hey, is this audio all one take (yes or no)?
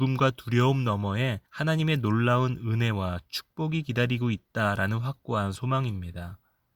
no